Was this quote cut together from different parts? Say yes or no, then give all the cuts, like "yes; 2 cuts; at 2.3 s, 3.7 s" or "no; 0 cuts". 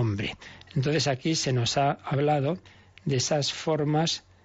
no; 0 cuts